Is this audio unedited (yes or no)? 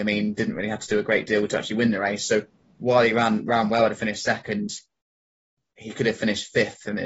yes